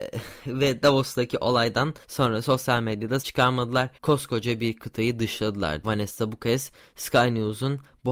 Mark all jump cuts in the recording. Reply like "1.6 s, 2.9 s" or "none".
2.0 s, 3.2 s, 3.9 s, 5.8 s